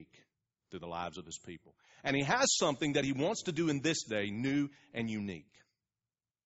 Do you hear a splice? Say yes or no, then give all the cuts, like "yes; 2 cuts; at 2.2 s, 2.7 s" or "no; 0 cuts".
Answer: no; 0 cuts